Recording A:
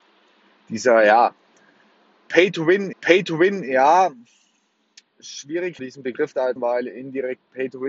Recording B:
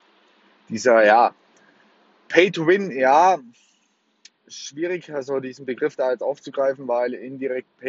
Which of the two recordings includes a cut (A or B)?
A